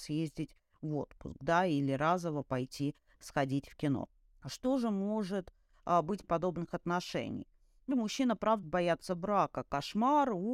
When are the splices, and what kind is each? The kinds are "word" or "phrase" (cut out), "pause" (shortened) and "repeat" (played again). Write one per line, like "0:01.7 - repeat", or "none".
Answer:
0:06.2 - word
0:07.9 - word
0:08.6 - word

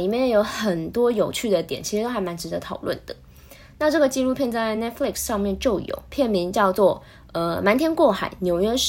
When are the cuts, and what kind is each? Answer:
none

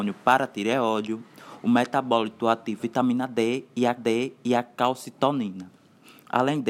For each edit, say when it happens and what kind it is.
0:02.8 - word
0:04.0 - repeat

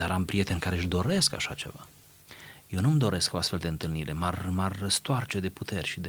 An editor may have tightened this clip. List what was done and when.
none

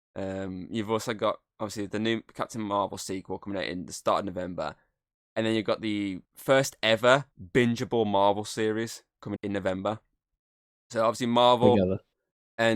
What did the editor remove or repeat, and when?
0:06.2 - pause
0:07.3 - pause
0:09.4 - word

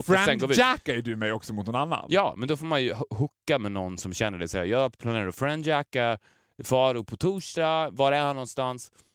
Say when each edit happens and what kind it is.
none

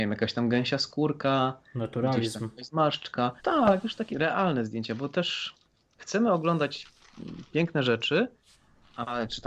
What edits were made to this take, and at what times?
0:03.4 - pause
0:04.1 - word

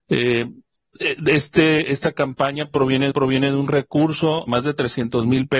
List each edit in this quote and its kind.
0:03.1 - repeat
0:04.5 - word

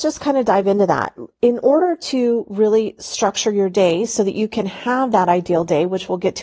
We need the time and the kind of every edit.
none

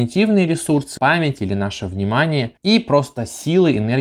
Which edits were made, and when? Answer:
0:01.0 - word
0:02.6 - pause

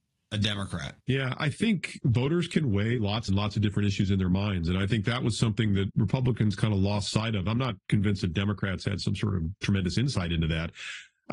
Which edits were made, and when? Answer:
0:01.0 - pause
0:03.3 - phrase
0:05.9 - word

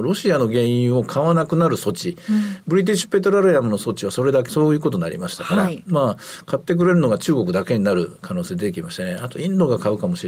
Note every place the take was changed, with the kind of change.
0:04.5 - word

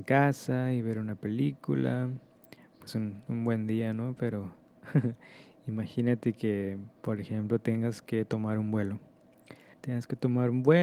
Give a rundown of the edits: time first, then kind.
0:02.9 - word
0:03.3 - word
0:07.0 - pause
0:09.7 - pause

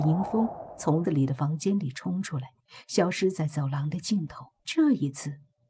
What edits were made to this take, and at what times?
0:01.0 - word
0:04.6 - pause

